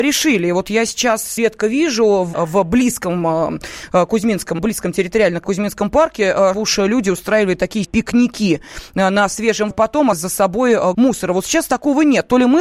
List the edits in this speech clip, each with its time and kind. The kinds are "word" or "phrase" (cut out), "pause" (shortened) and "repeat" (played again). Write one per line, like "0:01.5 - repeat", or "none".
0:01.4 - word
0:02.3 - word
0:04.6 - word
0:05.4 - word
0:06.5 - word
0:07.8 - word
0:09.7 - word
0:10.1 - word
0:10.9 - word